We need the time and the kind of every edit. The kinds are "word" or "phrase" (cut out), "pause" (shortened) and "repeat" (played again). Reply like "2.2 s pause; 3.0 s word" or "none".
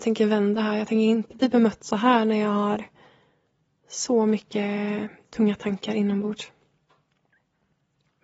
none